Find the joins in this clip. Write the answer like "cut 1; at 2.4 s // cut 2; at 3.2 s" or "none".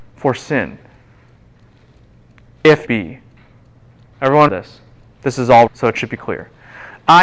cut 1; at 2.9 s // cut 2; at 4.5 s // cut 3; at 5.7 s // cut 4; at 6.2 s